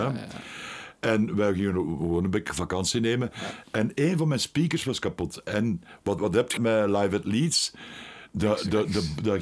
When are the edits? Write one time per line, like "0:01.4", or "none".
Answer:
0:06.2
0:06.6